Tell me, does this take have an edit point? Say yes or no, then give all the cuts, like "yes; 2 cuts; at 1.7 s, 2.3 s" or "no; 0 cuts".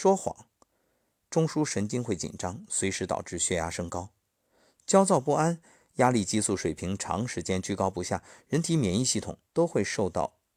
yes; 1 cut; at 9.5 s